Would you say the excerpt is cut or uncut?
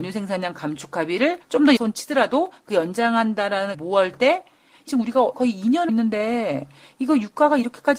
cut